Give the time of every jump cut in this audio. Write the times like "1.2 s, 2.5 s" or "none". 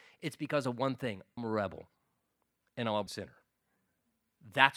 1.4 s, 3.1 s